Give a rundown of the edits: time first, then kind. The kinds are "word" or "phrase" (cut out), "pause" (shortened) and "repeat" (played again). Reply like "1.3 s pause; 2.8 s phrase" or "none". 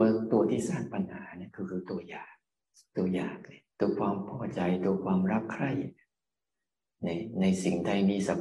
2.6 s pause; 3.7 s pause